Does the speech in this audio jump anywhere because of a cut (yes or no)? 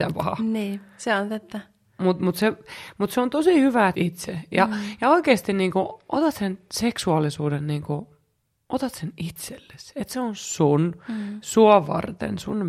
yes